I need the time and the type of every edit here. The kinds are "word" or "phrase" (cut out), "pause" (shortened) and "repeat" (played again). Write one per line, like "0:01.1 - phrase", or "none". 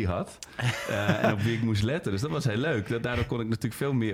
none